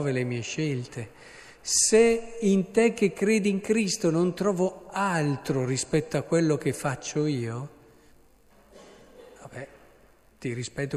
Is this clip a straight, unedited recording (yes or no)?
yes